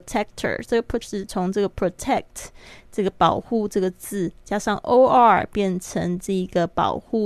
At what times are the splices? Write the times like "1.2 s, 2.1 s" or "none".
1.0 s